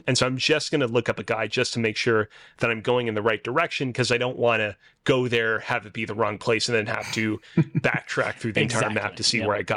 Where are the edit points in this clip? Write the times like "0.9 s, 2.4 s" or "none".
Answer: none